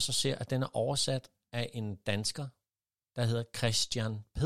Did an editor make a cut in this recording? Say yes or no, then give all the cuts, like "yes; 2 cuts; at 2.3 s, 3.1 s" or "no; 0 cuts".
no; 0 cuts